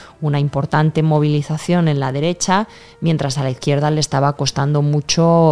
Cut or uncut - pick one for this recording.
uncut